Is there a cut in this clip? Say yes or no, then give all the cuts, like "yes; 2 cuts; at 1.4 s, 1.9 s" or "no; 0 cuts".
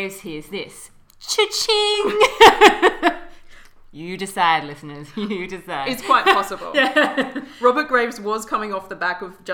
no; 0 cuts